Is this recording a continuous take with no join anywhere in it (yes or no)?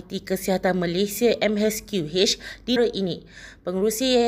no